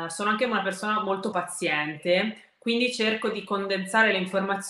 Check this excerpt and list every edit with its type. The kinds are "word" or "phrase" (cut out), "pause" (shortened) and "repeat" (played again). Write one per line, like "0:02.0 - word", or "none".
0:01.3 - word